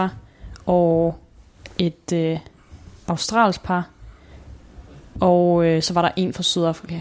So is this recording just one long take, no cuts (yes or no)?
yes